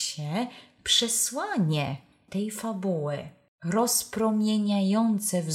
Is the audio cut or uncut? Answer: uncut